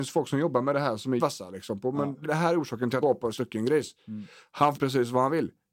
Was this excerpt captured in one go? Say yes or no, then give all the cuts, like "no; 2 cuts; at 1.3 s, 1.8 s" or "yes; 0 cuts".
no; 5 cuts; at 1.2 s, 2.2 s, 3.0 s, 3.3 s, 4.7 s